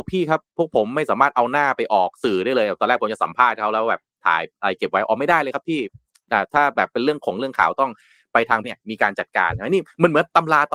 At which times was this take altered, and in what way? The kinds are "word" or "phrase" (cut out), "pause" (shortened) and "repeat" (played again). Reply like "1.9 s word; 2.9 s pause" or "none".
8.6 s word